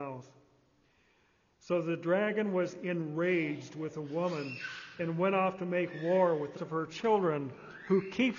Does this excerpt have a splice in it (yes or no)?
yes